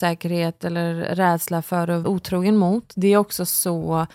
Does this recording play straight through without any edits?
no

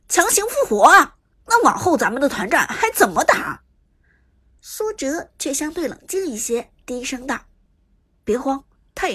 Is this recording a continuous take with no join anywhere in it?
no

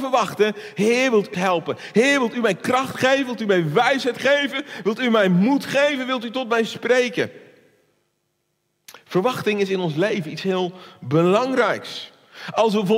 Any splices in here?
yes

